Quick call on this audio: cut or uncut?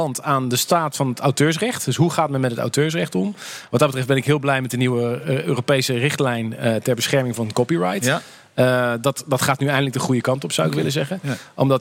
uncut